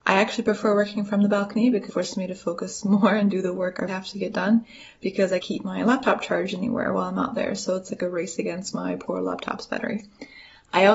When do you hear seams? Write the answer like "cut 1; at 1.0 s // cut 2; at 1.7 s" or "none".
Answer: cut 1; at 1.9 s // cut 2; at 3.9 s // cut 3; at 5.4 s